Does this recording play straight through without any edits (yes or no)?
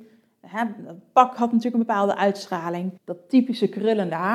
no